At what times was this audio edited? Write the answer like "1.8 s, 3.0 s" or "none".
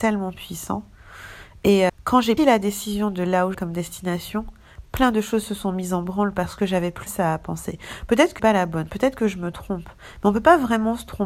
1.9 s, 2.4 s, 3.5 s, 7.1 s, 8.4 s